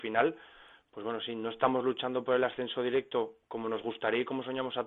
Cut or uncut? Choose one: uncut